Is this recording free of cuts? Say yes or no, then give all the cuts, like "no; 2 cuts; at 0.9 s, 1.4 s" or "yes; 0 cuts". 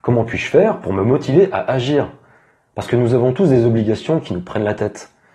yes; 0 cuts